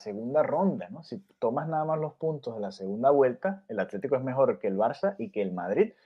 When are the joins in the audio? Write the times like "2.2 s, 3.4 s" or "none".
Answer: none